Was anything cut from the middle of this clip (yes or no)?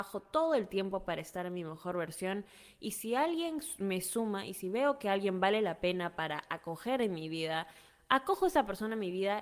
no